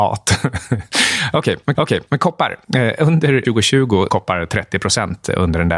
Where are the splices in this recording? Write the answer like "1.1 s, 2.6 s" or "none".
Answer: 1.7 s, 3.4 s, 4.1 s